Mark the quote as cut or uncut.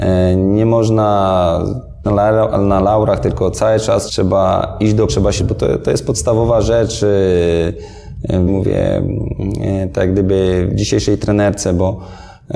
cut